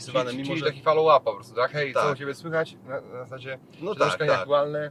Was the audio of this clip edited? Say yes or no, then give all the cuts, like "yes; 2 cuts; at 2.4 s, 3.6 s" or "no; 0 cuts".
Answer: no; 0 cuts